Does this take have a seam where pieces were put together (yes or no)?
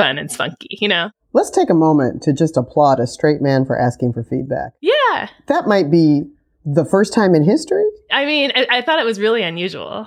no